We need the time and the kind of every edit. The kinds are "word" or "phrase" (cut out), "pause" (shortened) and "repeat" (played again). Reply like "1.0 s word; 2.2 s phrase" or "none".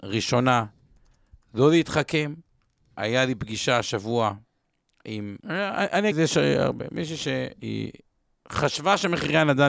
5.4 s pause; 6.1 s word